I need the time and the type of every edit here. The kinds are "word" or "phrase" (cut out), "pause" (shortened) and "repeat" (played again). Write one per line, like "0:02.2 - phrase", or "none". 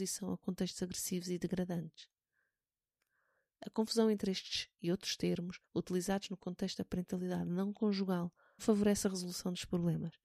0:05.6 - pause
0:08.6 - word